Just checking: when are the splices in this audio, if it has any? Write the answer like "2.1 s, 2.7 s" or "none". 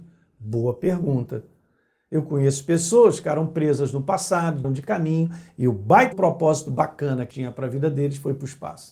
4.6 s, 6.1 s, 7.3 s